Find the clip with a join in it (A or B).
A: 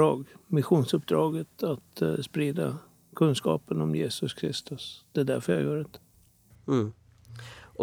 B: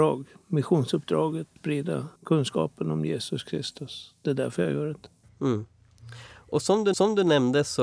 B